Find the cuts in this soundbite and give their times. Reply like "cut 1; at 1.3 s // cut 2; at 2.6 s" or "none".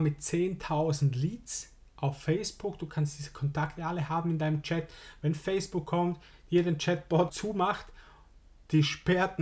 cut 1; at 7.3 s